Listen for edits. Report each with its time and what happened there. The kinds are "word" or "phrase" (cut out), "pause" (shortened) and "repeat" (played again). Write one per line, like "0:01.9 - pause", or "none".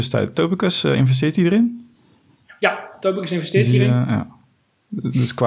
none